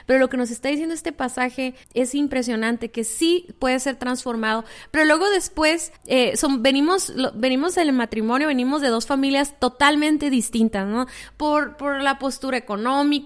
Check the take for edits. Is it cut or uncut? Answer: cut